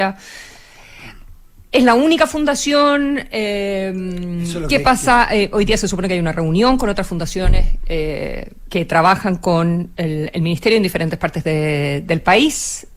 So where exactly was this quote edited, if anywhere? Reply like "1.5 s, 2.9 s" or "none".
none